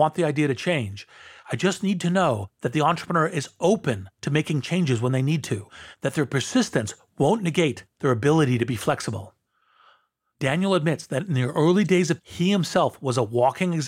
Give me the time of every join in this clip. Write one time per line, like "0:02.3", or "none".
0:12.2